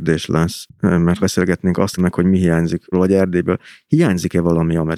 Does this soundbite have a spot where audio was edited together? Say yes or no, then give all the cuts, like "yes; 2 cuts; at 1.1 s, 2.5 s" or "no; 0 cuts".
yes; 3 cuts; at 1.2 s, 2.0 s, 2.9 s